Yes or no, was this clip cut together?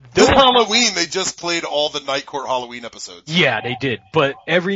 no